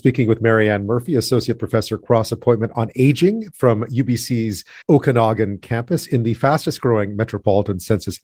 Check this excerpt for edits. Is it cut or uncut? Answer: cut